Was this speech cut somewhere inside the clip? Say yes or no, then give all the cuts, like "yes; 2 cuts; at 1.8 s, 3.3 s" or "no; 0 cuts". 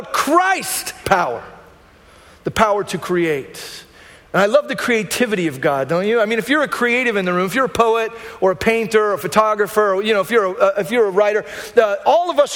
yes; 1 cut; at 1.0 s